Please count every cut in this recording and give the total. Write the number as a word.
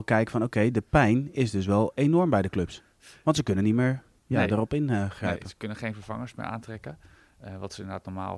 zero